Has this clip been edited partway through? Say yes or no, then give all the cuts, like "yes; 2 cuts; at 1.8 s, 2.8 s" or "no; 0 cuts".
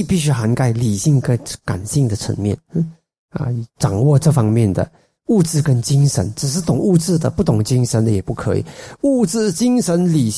no; 0 cuts